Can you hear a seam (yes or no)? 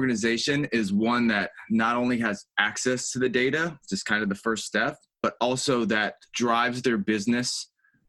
no